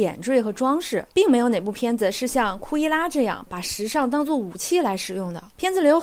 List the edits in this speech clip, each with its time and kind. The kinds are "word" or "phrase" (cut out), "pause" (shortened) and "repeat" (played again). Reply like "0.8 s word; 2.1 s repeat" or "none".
none

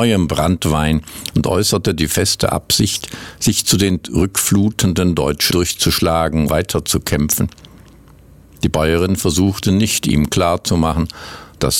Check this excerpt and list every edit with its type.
5.5 s word; 6.5 s word

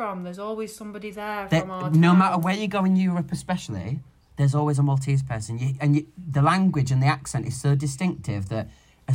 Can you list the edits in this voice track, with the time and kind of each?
none

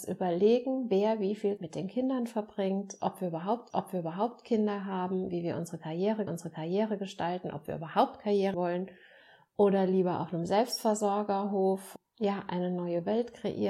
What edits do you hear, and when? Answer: 1.6 s word; 3.7 s repeat; 6.3 s repeat; 8.5 s word

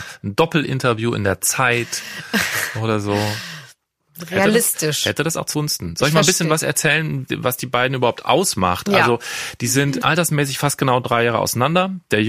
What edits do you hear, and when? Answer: 5.5 s word; 7.3 s word

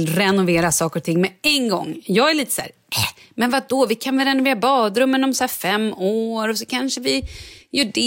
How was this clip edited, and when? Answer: none

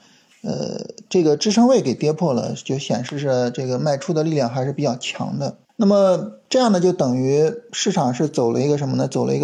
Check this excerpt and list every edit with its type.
5.6 s pause

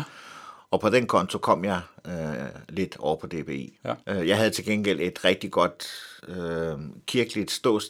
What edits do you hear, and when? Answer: 4.0 s pause; 6.2 s pause

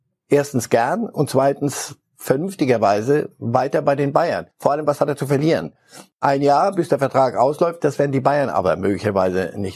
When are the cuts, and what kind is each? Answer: 4.5 s pause

